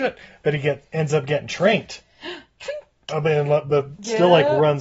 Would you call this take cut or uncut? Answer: uncut